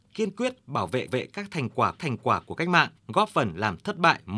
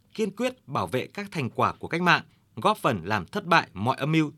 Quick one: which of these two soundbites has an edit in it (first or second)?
first